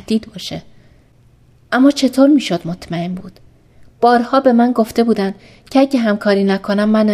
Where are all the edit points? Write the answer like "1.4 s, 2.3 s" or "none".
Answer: none